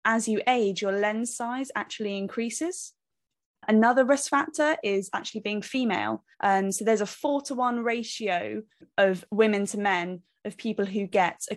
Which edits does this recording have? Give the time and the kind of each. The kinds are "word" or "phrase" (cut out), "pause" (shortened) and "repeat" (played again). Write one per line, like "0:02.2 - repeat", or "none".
0:06.3 - pause